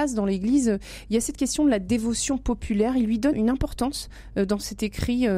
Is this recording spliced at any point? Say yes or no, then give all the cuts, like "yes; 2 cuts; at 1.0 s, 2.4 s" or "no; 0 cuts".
yes; 1 cut; at 3.3 s